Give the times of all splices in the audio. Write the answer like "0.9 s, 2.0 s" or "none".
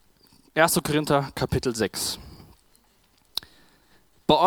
none